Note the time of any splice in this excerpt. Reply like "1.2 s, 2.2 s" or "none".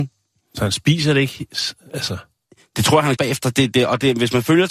3.2 s